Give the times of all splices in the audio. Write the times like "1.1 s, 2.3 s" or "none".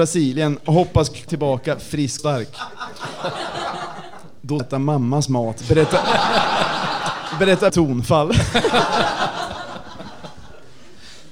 1.3 s, 2.2 s, 4.6 s, 7.7 s

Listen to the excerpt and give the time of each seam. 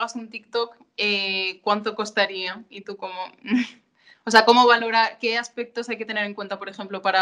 none

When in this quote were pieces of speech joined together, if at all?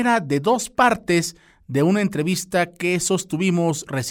none

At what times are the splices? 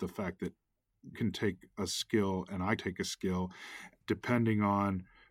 1.1 s, 2.8 s, 4.0 s

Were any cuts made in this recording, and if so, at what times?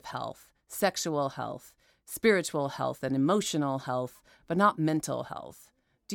none

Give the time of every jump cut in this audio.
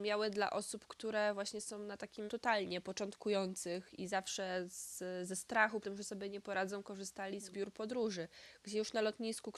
2.3 s, 5.8 s, 7.5 s

